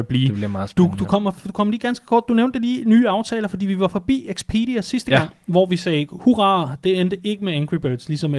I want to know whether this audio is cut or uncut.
uncut